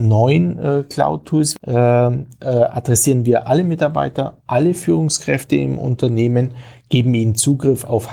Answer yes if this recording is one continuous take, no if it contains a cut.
yes